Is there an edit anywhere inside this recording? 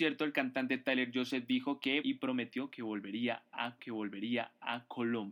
yes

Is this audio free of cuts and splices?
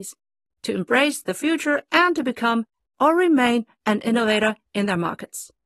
yes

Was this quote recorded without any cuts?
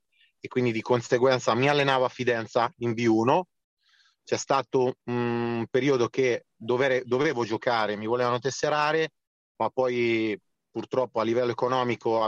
yes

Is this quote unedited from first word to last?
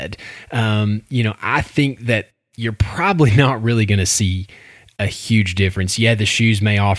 yes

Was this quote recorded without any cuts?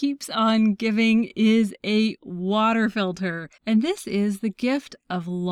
no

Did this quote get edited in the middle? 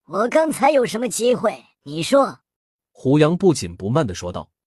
yes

